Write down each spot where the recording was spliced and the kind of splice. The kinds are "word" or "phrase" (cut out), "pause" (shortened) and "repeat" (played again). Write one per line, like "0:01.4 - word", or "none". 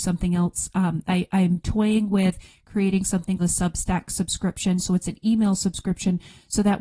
0:03.4 - word